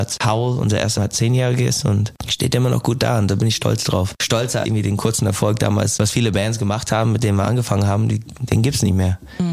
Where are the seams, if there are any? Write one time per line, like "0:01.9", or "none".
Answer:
0:01.0
0:04.6
0:06.0

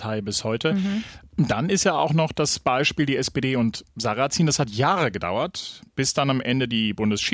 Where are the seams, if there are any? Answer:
none

